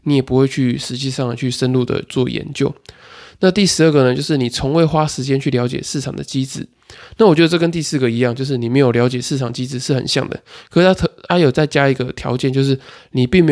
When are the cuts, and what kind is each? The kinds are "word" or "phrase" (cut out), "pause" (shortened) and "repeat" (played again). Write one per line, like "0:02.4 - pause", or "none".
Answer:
none